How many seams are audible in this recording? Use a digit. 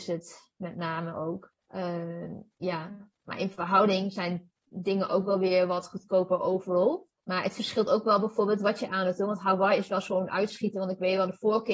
4